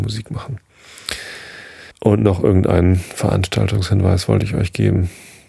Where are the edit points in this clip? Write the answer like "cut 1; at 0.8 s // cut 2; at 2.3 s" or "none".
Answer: cut 1; at 1.9 s